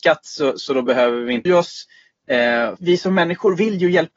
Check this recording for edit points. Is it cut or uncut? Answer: cut